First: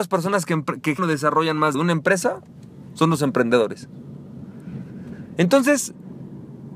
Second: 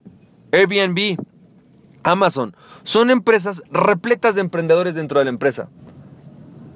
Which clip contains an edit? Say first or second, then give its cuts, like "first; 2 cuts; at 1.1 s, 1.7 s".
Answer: first; 2 cuts; at 1.0 s, 1.7 s